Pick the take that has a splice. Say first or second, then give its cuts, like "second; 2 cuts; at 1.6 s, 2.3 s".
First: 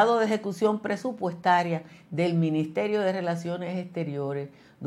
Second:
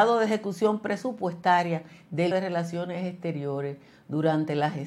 second; 1 cut; at 2.3 s